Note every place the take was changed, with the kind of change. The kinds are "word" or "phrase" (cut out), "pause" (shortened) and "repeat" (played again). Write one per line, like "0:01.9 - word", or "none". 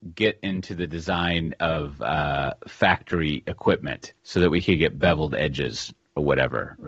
0:04.2 - pause